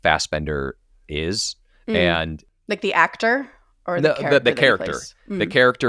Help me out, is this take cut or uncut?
uncut